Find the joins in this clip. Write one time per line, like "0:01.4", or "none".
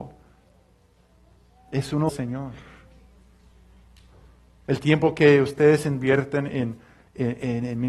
0:02.1

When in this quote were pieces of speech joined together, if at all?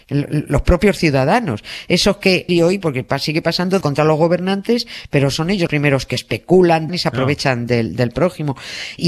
0:02.5
0:03.8
0:05.7
0:06.9

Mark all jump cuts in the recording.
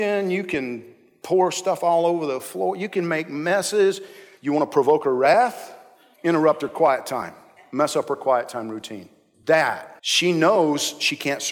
0:10.0

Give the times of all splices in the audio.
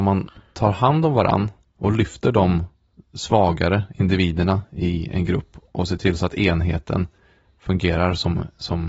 none

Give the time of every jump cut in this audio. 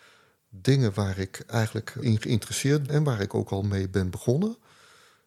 0:02.0
0:02.9

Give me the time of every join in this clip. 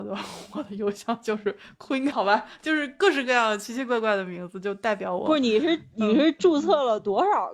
0:02.1

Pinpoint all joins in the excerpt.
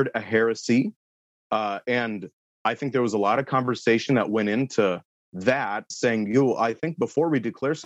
none

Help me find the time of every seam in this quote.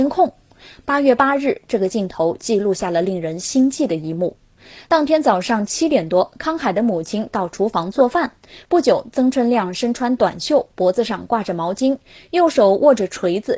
none

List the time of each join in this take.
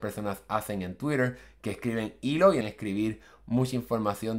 0:02.6

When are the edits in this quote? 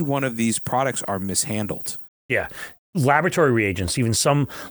0:02.1

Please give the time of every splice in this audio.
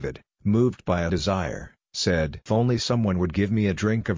0:01.1
0:02.5

